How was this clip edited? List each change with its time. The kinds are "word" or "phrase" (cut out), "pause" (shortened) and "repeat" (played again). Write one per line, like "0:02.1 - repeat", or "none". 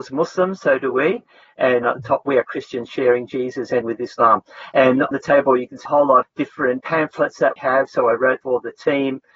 0:01.8 - word
0:03.8 - word
0:05.1 - word
0:05.9 - word
0:06.2 - word
0:06.8 - word
0:07.6 - word
0:08.4 - word